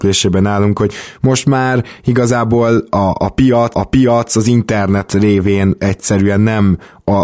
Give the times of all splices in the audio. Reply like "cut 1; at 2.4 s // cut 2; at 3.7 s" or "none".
cut 1; at 3.7 s